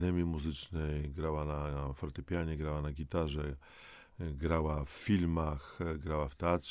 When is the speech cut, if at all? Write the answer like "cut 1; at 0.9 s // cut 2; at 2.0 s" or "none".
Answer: none